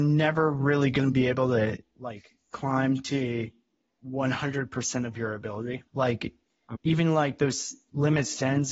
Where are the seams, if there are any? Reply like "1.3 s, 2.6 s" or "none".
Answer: 5.9 s